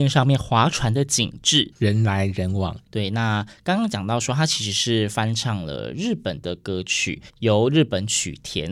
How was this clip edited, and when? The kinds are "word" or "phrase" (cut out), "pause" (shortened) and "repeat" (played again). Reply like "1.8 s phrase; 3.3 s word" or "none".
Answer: 1.7 s word; 7.3 s pause